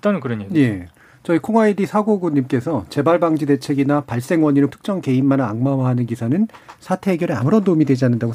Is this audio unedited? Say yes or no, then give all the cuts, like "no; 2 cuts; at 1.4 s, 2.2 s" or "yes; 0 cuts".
no; 1 cut; at 4.7 s